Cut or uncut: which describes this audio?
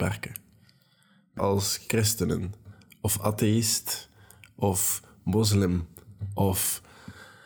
cut